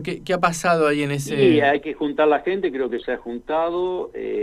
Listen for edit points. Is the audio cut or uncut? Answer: cut